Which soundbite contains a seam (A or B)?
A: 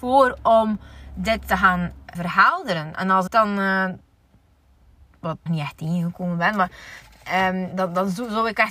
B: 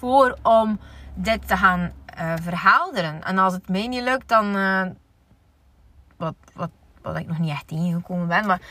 A